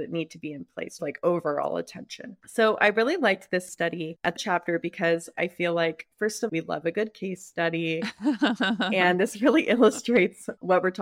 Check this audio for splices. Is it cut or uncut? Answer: cut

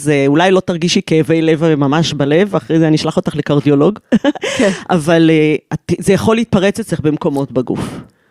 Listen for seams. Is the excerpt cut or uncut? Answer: uncut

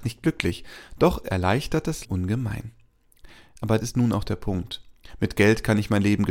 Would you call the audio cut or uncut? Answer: cut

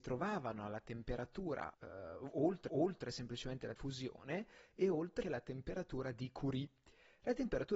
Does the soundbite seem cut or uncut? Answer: cut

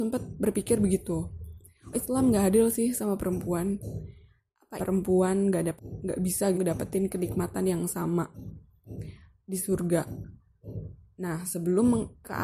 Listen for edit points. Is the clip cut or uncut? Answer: cut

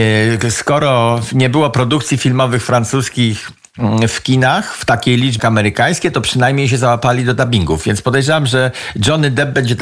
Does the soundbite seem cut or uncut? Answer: cut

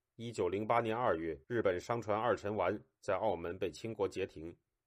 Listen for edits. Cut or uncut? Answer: cut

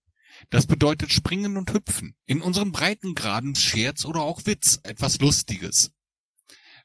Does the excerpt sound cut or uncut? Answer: cut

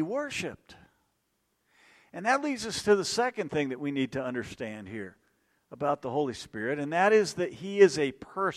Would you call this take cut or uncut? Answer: uncut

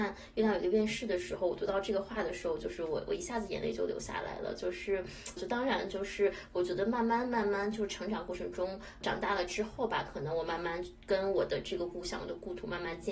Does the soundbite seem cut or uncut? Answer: cut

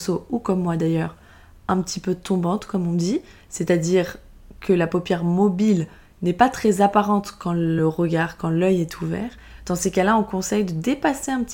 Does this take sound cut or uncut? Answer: uncut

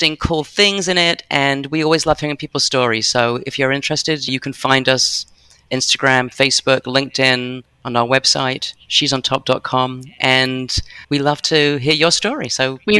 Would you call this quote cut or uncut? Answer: cut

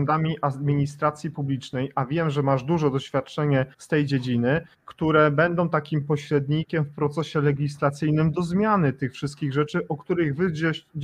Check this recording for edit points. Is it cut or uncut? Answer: cut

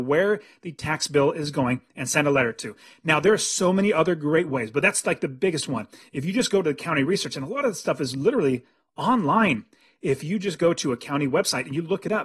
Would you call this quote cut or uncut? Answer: uncut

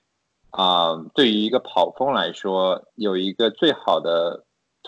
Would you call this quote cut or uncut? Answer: cut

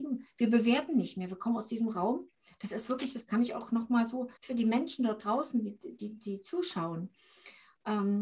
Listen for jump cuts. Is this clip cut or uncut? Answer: cut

